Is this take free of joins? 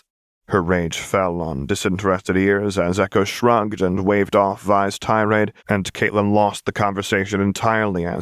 no; 1 cut; at 5.6 s

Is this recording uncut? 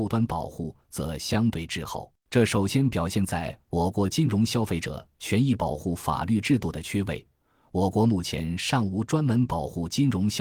no; 1 cut; at 2.2 s

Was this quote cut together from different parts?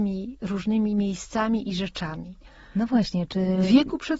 no; 0 cuts

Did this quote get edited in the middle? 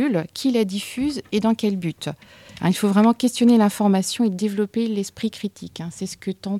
no; 0 cuts

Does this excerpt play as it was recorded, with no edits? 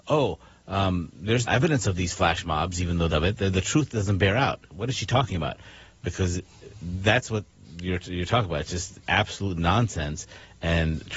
no; 3 cuts; at 1.5 s, 3.1 s, 9.0 s

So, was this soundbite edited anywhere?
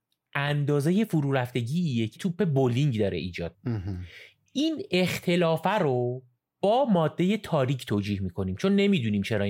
yes; 2 cuts; at 2.2 s, 3.5 s

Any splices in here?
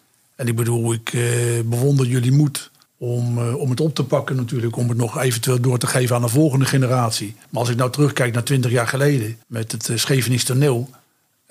yes; 3 cuts; at 2.9 s, 7.4 s, 9.4 s

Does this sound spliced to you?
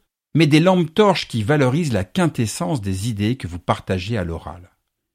no; 0 cuts

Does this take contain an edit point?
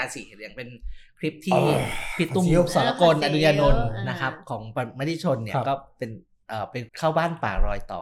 yes; 1 cut; at 6.9 s

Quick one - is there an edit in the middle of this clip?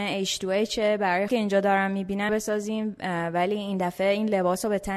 yes; 2 cuts; at 1.3 s, 2.3 s

